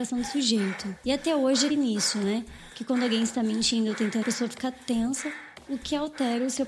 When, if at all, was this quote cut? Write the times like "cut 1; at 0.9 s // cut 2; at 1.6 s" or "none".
cut 1; at 1.7 s // cut 2; at 4.2 s